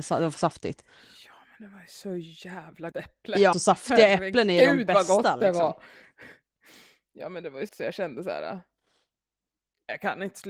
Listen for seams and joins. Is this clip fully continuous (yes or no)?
no